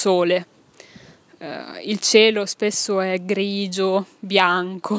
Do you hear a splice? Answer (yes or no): no